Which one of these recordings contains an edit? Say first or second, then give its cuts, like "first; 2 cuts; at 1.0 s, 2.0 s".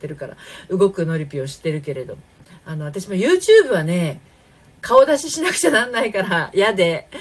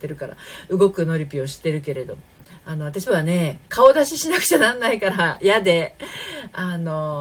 second; 2 cuts; at 3.1 s, 3.7 s